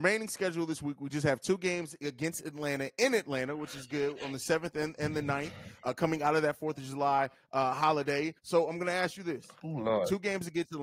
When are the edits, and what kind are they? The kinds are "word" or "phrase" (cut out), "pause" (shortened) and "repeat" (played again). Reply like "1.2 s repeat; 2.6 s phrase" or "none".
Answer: 8.4 s pause

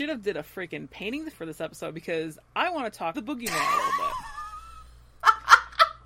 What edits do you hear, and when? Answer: 1.3 s word; 2.5 s pause; 3.1 s phrase

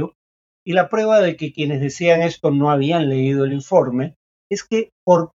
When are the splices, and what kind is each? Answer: none

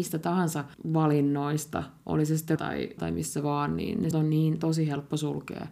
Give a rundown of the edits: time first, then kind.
2.6 s word; 3.0 s word; 4.1 s word

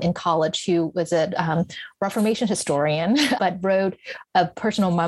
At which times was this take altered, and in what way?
3.4 s word

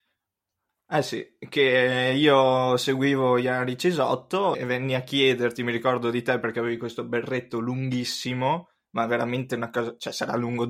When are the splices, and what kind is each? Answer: 4.5 s word

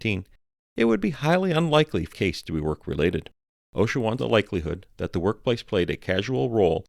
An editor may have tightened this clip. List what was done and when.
2.1 s word; 3.4 s pause; 4.2 s phrase

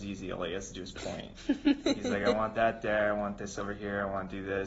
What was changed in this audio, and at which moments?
none

